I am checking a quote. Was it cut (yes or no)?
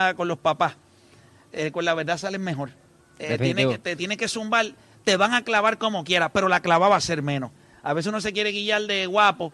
no